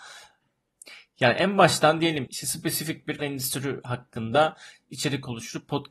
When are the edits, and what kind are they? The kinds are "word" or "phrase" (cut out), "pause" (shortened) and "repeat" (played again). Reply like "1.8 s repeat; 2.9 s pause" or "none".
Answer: 2.3 s word; 3.2 s word